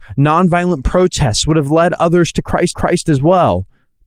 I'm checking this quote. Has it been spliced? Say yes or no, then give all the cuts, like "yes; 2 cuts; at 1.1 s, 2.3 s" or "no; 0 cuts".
yes; 1 cut; at 2.7 s